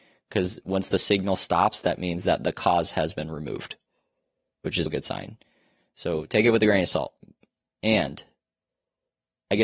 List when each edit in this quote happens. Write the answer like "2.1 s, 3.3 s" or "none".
4.9 s